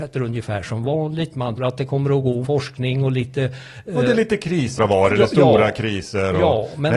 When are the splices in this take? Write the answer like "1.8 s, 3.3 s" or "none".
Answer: 1.6 s, 2.4 s, 4.8 s